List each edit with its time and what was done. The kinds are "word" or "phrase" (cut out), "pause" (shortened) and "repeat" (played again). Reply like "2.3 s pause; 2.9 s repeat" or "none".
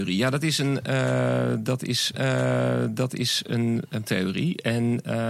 2.1 s repeat; 4.1 s word

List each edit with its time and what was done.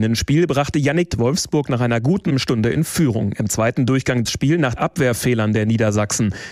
1.1 s word; 2.3 s word; 4.3 s phrase; 4.8 s word

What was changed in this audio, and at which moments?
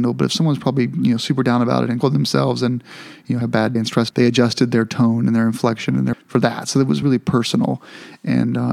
2.0 s word; 3.4 s word; 3.8 s word; 4.1 s word; 6.1 s word; 7.0 s word

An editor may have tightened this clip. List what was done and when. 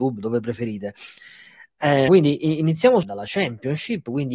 2.1 s word; 3.0 s phrase

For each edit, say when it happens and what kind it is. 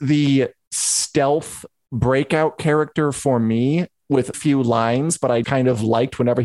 4.3 s word; 5.4 s word

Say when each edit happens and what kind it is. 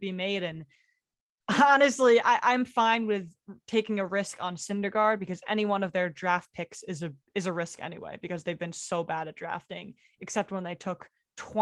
7.2 s pause

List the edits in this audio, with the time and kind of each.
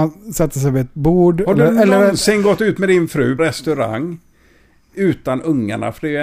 3.4 s word

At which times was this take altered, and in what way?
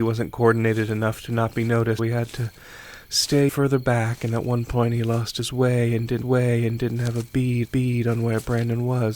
2.0 s word; 3.5 s word; 6.2 s repeat; 7.6 s repeat

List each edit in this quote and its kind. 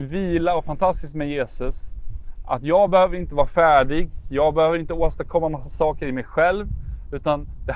none

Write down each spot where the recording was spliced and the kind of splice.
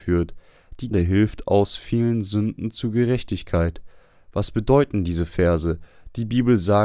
0.9 s word

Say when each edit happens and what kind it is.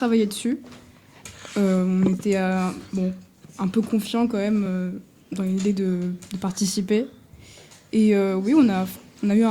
none

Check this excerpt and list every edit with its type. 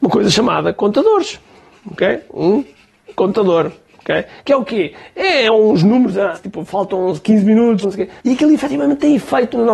6.3 s phrase; 7.8 s word; 8.2 s pause

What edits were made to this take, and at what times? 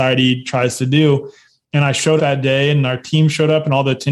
2.2 s word

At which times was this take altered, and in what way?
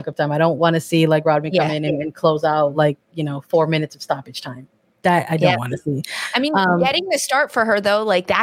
none

